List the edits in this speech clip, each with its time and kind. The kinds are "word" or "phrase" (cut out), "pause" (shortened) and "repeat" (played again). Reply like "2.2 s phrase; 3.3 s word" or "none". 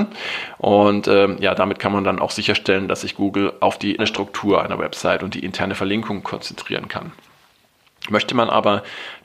4.0 s word